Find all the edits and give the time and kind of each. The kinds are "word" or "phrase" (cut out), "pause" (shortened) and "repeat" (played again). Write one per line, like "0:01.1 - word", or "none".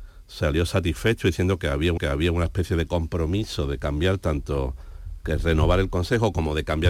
0:02.0 - repeat